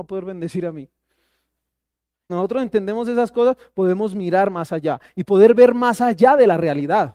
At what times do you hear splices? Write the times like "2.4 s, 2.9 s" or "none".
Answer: 2.3 s